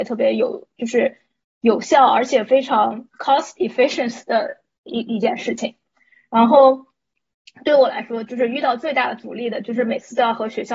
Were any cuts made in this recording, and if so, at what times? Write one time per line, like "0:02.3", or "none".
none